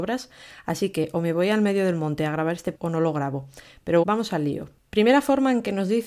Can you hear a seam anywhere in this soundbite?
yes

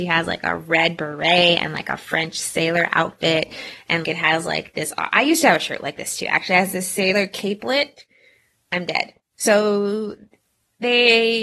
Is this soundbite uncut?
no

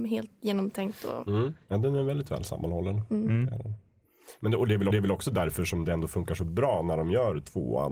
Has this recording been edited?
yes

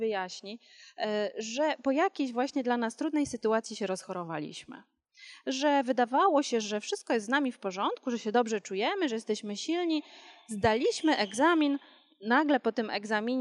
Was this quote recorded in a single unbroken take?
yes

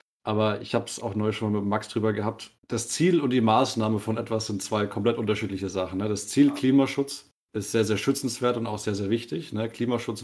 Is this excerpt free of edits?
no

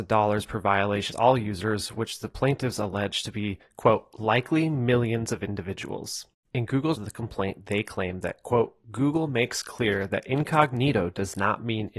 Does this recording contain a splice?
yes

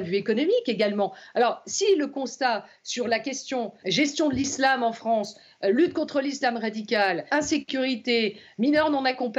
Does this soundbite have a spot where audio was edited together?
yes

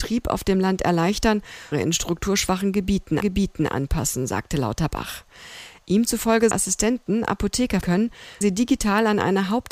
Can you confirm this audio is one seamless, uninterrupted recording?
no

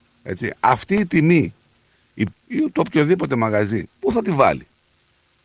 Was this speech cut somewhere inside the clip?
yes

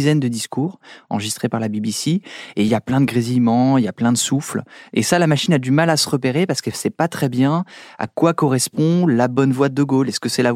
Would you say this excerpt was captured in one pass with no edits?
yes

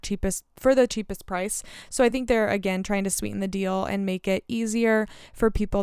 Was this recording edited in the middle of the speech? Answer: no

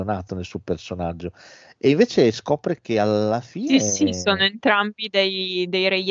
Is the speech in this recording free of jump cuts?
yes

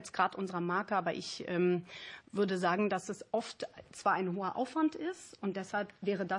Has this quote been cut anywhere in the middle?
no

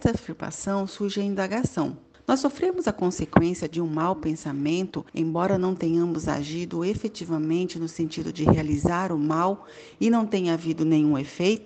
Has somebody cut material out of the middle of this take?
yes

